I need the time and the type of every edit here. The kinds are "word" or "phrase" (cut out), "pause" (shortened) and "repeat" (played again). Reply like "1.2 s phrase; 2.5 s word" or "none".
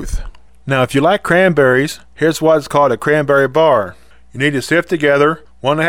none